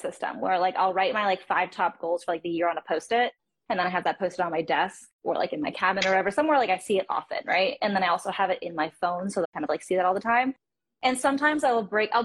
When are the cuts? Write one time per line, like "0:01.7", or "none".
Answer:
0:09.4